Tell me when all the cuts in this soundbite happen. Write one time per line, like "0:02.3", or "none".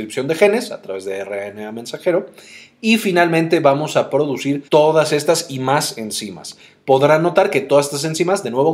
0:04.7